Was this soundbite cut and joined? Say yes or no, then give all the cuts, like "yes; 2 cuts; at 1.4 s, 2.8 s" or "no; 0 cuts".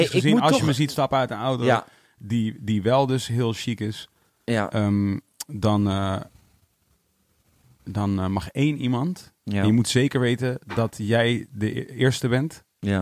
no; 0 cuts